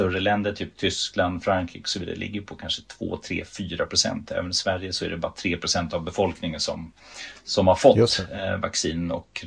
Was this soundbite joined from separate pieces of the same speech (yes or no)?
no